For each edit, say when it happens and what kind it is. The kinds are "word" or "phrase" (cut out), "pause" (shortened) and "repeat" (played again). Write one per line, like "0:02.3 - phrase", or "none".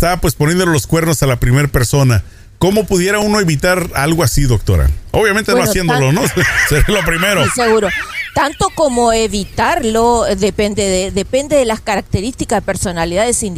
none